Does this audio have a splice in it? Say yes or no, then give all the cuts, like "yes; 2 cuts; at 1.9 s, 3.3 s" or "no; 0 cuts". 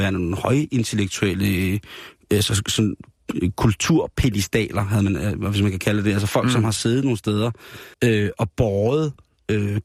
yes; 1 cut; at 7.9 s